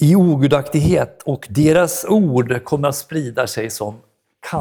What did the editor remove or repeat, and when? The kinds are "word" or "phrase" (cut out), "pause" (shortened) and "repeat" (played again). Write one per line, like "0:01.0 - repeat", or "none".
none